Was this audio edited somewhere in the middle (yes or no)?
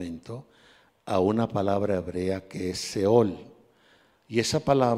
no